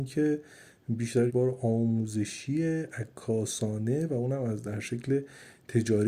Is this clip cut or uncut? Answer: cut